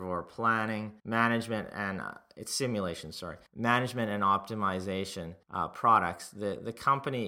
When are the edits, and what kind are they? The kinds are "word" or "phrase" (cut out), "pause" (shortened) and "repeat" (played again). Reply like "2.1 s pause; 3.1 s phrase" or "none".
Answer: 1.0 s pause; 3.5 s pause; 5.4 s pause

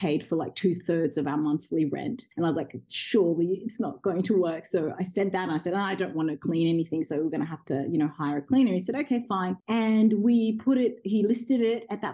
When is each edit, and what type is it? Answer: 2.3 s pause; 9.6 s pause

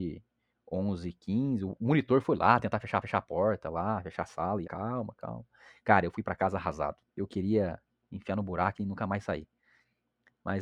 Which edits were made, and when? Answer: 3.0 s repeat; 4.6 s phrase; 7.1 s pause

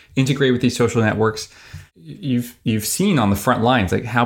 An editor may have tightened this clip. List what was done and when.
none

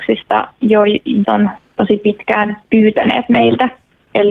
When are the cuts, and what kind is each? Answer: 1.2 s phrase

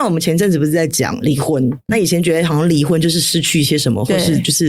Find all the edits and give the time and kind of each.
1.9 s word

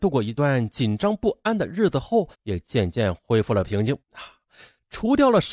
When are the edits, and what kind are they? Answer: 2.3 s pause; 4.0 s pause

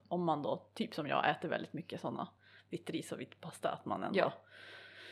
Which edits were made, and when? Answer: none

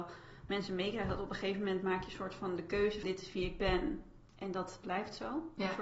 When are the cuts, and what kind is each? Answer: 3.0 s word; 4.3 s pause

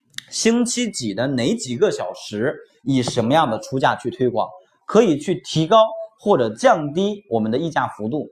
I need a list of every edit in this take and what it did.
none

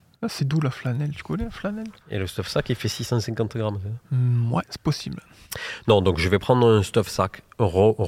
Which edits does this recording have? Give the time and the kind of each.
2.0 s pause

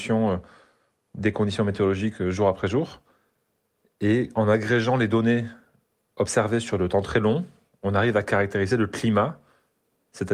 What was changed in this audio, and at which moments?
none

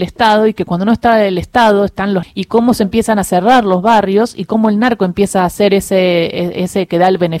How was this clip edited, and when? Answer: 2.2 s word

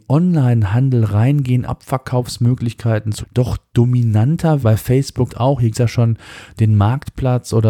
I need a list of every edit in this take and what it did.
1.6 s word; 3.2 s word; 4.6 s word; 5.3 s word; 5.7 s word

